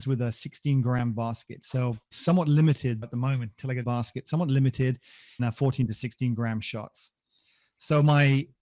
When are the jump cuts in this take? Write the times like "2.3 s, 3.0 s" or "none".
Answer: 2.1 s, 3.0 s, 3.8 s, 5.4 s